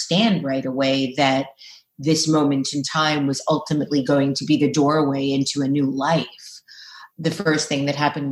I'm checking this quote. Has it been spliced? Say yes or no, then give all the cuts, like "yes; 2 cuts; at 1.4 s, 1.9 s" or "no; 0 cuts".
no; 0 cuts